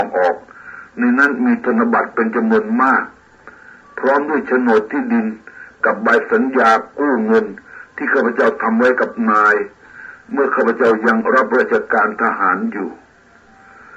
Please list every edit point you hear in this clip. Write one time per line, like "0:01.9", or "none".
none